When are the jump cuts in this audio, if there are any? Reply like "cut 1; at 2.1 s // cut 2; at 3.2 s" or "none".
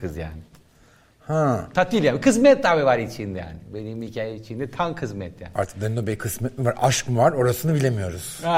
none

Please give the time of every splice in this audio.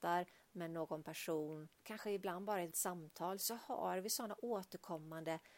cut 1; at 1.7 s // cut 2; at 2.7 s

